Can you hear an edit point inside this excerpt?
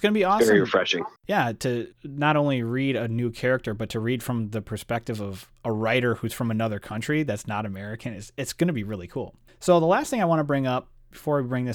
yes; 3 cuts; at 1.2 s, 1.9 s, 9.5 s

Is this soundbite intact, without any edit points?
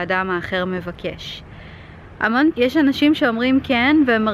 no; 1 cut; at 2.5 s

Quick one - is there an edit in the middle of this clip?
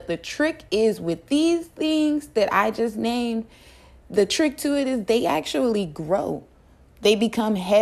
no; 0 cuts

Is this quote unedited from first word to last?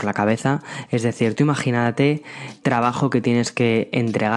no; 1 cut; at 2.6 s

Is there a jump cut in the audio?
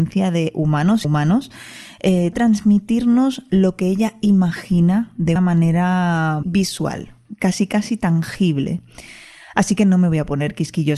yes; 4 cuts; at 1.0 s, 2.3 s, 5.4 s, 6.4 s

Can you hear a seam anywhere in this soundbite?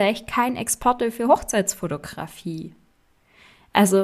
no; 0 cuts

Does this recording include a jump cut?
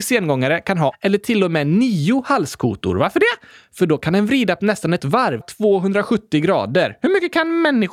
yes; 4 cuts; at 0.9 s, 4.6 s, 5.0 s, 5.4 s

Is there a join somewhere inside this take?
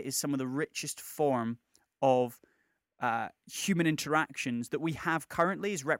no; 0 cuts

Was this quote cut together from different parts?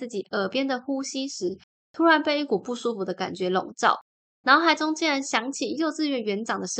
no; 0 cuts

